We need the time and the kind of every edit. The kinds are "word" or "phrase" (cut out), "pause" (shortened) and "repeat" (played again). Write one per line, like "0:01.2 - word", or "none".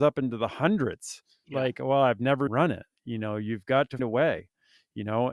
0:01.4 - word
0:02.5 - word
0:04.0 - word